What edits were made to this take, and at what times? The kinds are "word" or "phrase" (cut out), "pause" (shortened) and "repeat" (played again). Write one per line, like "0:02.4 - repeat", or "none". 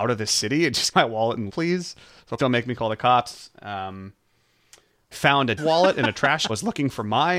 0:00.9 - word
0:01.5 - word
0:02.4 - word
0:05.1 - word
0:05.6 - phrase
0:06.5 - phrase

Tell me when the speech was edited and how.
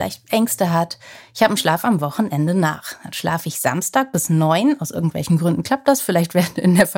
0:01.6 - phrase

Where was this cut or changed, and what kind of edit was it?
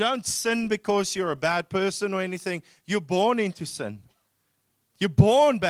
none

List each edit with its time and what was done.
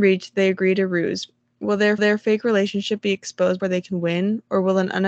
0:02.0 - repeat
0:03.6 - word

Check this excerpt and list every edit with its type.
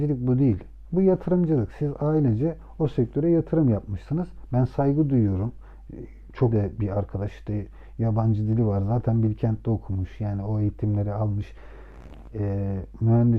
0:06.5 - word

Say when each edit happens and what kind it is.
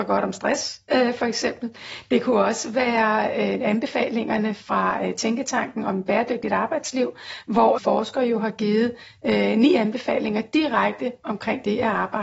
0:07.8 - word

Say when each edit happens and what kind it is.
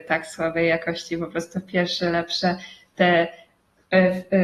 none

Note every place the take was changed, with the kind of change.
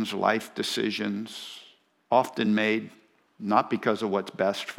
none

